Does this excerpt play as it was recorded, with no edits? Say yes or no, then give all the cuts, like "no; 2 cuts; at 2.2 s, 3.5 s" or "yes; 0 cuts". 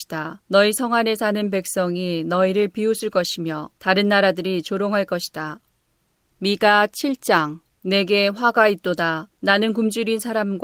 yes; 0 cuts